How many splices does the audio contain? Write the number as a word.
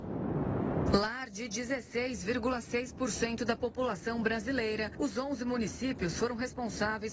zero